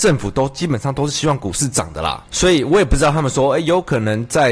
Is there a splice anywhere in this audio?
yes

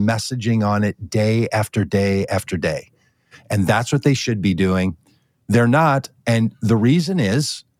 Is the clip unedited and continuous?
yes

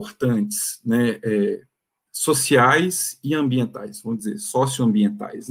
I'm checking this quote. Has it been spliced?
no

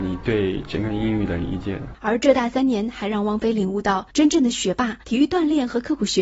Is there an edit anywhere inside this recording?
yes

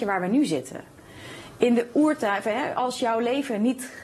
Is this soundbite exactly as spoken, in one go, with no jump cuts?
yes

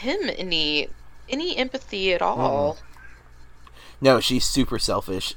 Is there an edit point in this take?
no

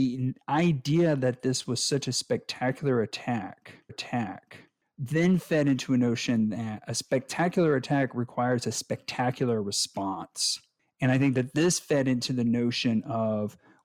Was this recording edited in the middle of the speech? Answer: yes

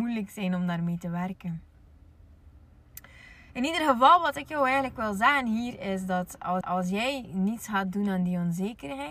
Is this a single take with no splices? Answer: no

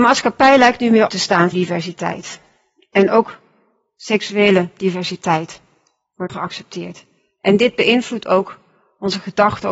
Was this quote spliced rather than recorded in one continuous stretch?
yes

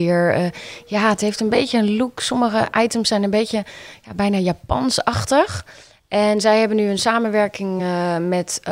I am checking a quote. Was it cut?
no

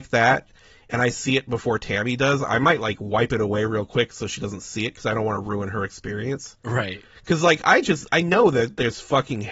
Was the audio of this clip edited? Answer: no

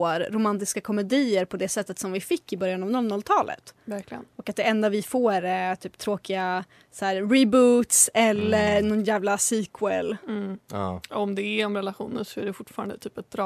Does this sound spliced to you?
no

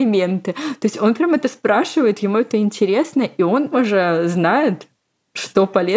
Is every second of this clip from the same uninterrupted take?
no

